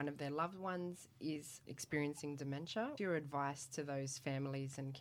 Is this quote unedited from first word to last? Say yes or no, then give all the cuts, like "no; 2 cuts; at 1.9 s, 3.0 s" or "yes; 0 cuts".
no; 2 cuts; at 1.6 s, 3.0 s